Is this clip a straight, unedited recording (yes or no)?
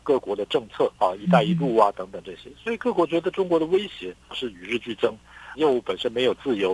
no